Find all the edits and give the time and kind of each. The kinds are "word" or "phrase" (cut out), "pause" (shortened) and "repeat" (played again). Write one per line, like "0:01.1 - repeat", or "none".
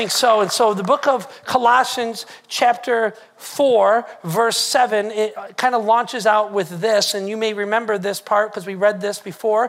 none

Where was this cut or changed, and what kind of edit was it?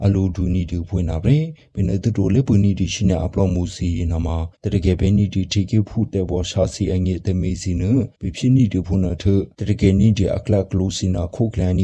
0:04.5 - pause
0:08.1 - pause

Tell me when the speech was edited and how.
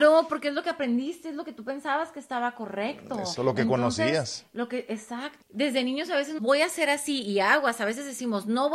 0:03.4 - word
0:05.4 - word
0:06.4 - word

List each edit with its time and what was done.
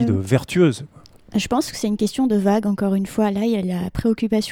none

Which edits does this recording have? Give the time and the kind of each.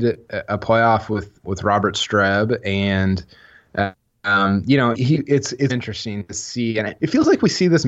0:01.4 - word
0:04.9 - word
0:05.7 - word
0:07.0 - word

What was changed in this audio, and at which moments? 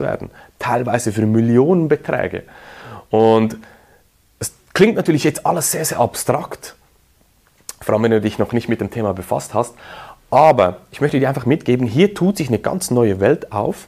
none

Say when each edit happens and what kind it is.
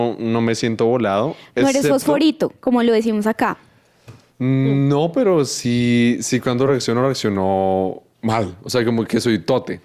none

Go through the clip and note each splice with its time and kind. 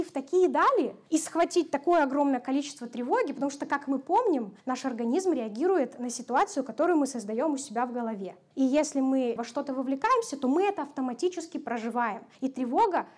0:09.4 - word

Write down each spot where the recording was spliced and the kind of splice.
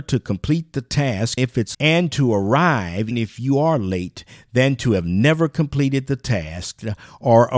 0:01.4 - word
0:01.7 - word
0:03.1 - word

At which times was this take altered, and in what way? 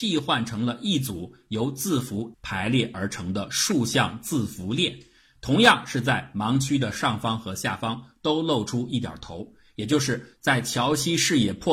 0:02.3 - word

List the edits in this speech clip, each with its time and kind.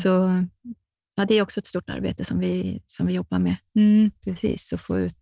0:04.2 - pause

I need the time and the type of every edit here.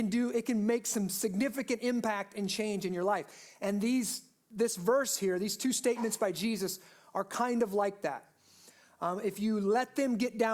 none

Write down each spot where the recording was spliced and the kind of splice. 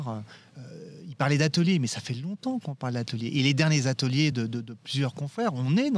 none

